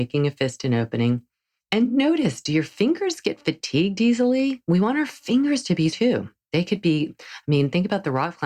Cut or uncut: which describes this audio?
cut